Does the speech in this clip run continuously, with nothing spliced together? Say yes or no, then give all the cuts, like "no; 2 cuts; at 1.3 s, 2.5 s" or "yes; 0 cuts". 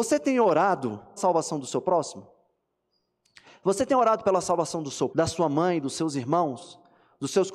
no; 2 cuts; at 1.2 s, 5.1 s